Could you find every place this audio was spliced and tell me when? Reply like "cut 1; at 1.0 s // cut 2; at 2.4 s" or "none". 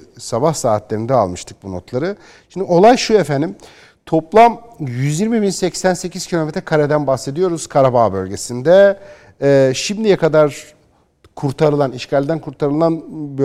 none

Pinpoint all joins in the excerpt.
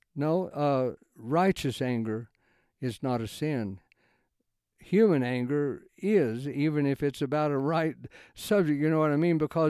cut 1; at 5.9 s

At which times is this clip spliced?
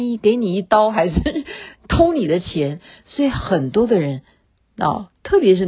none

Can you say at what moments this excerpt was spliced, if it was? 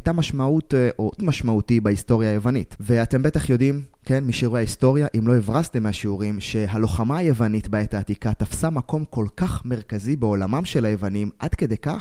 cut 1; at 1.2 s

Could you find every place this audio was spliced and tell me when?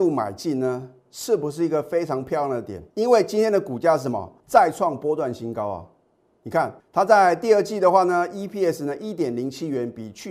cut 1; at 2.9 s // cut 2; at 4.4 s // cut 3; at 6.8 s

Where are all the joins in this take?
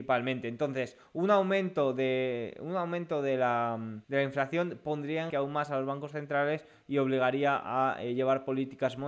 cut 1; at 4.0 s // cut 2; at 5.3 s

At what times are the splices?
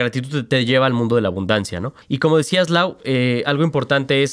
cut 1; at 2.0 s

